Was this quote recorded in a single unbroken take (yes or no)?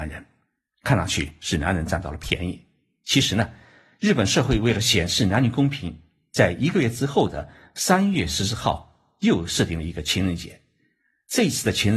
yes